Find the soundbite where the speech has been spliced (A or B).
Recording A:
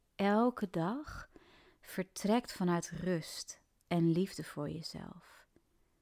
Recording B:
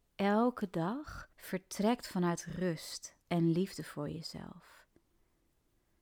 B